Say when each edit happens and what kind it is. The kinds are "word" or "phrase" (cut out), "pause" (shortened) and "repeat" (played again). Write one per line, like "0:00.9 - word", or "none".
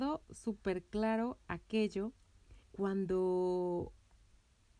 0:02.6 - pause